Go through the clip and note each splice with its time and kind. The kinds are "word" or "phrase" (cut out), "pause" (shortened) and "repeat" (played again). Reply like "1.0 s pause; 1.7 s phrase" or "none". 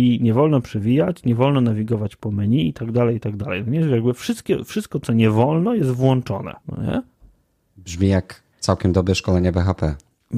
6.6 s pause; 8.5 s pause